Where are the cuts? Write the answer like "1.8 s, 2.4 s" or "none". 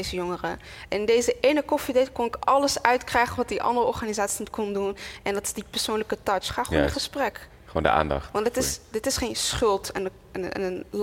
none